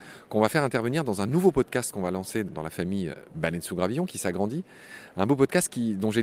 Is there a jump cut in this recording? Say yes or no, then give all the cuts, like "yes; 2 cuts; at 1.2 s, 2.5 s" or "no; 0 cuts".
no; 0 cuts